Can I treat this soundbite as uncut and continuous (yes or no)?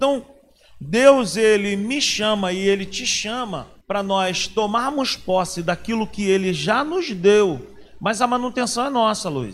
no